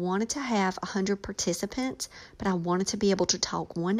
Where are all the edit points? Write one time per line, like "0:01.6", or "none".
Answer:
none